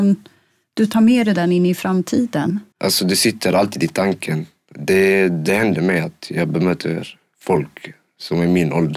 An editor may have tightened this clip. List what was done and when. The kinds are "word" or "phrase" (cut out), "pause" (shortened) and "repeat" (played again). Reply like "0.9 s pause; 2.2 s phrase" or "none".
2.7 s pause